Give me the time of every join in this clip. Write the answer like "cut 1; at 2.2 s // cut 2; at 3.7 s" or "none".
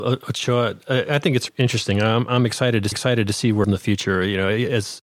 cut 1; at 1.5 s // cut 2; at 2.9 s // cut 3; at 3.6 s